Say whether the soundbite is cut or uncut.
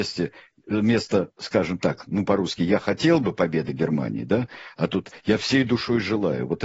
uncut